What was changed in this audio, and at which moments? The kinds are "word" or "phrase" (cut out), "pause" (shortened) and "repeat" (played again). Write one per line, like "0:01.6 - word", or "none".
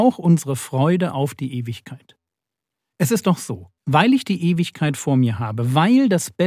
0:03.8 - pause